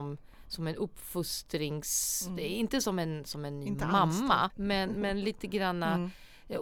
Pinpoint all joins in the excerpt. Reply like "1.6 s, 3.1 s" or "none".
4.5 s